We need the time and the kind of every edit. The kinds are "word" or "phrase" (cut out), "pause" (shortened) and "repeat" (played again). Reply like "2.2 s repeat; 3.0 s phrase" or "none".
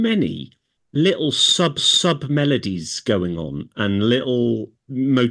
1.8 s repeat